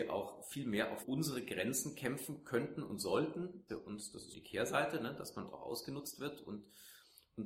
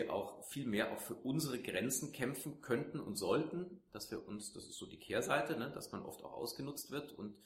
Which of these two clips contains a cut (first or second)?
first